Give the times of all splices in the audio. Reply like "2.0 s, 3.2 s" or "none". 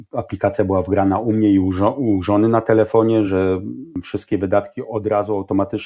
none